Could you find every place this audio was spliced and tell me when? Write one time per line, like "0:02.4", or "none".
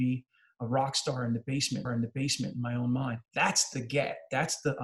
0:01.9
0:03.3